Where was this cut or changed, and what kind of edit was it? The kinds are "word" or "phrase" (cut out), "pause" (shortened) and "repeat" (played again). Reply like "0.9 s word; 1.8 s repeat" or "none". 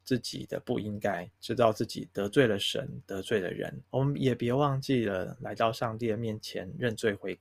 1.4 s pause; 3.9 s pause